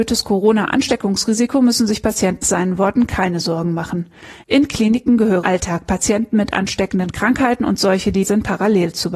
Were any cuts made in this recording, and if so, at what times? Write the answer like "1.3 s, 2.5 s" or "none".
2.4 s, 5.4 s, 8.2 s